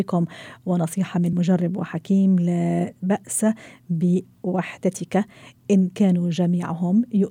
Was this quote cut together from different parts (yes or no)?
no